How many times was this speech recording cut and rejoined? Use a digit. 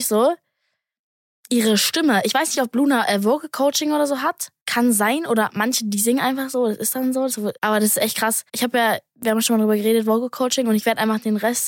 3